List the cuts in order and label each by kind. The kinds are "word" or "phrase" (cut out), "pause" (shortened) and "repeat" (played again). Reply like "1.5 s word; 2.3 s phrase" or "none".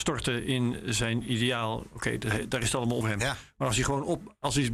3.0 s word

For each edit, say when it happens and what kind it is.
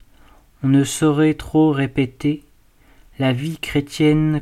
none

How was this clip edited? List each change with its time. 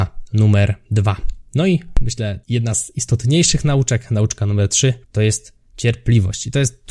2.4 s pause; 5.0 s pause

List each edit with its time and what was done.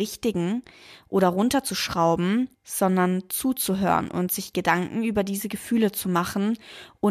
2.5 s pause

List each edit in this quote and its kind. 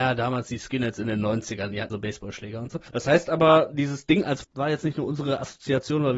1.9 s word; 2.9 s pause; 4.4 s word

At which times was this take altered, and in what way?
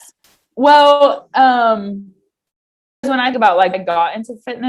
3.0 s word; 3.3 s word; 3.7 s word

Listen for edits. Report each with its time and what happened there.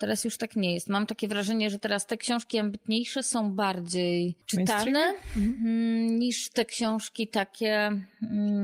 none

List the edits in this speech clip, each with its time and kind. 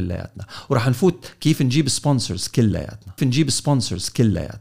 3.2 s repeat

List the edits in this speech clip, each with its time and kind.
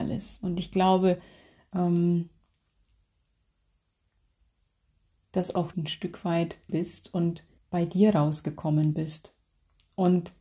5.7 s phrase; 6.7 s word; 7.6 s pause

